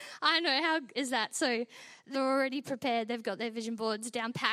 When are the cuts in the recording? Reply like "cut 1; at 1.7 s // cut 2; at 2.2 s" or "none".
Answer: cut 1; at 0.9 s // cut 2; at 2.1 s